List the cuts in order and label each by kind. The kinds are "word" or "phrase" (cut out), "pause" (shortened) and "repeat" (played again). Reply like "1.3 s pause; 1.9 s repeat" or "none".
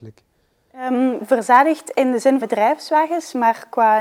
1.2 s word; 2.4 s word